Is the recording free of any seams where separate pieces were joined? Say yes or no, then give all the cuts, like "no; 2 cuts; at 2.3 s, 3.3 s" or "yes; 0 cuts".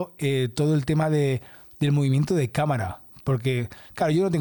yes; 0 cuts